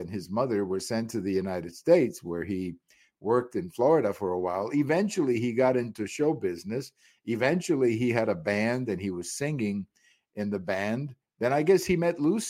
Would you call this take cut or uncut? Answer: uncut